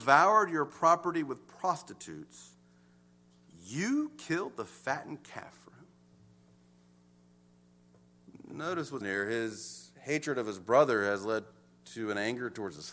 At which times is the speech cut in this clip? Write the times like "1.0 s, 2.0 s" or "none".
9.0 s